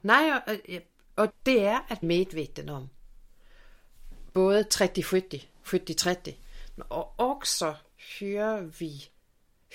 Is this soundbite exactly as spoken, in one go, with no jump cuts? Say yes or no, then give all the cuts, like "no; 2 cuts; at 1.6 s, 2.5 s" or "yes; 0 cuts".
no; 2 cuts; at 1.3 s, 2.0 s